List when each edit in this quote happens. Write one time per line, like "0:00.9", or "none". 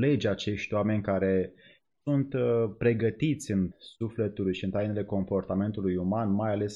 0:02.0
0:03.7